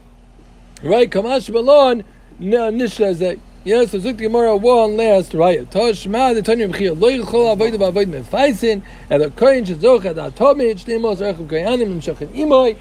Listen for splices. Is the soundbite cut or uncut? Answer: uncut